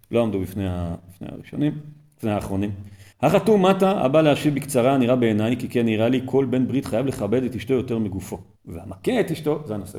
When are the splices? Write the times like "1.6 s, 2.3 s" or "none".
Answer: 3.1 s, 8.6 s